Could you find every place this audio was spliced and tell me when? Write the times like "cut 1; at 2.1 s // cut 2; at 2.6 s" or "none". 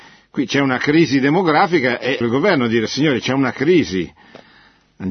cut 1; at 2.2 s